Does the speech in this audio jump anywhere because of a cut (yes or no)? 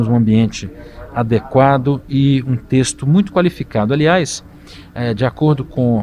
no